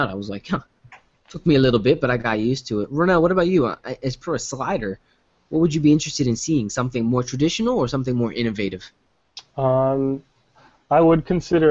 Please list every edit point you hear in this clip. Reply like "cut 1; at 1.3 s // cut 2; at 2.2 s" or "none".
none